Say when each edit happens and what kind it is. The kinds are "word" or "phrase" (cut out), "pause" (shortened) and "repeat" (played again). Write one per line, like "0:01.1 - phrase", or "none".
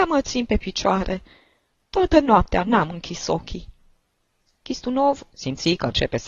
none